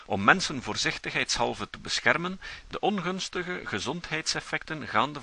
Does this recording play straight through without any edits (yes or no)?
no